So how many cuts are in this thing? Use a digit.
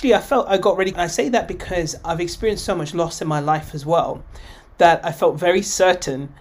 1